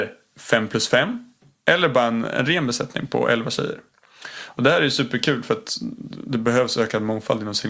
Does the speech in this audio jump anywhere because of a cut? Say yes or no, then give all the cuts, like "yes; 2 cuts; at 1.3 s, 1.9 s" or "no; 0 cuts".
no; 0 cuts